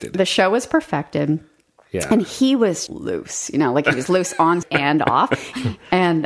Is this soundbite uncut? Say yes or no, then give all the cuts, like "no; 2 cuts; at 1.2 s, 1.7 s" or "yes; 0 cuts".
no; 2 cuts; at 2.9 s, 4.6 s